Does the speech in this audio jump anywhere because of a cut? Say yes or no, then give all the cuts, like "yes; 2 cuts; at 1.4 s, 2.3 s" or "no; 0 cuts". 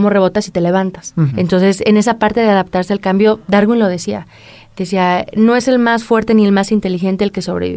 yes; 1 cut; at 1.3 s